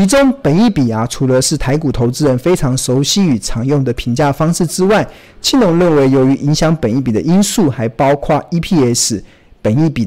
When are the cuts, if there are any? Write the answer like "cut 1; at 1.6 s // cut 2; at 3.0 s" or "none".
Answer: none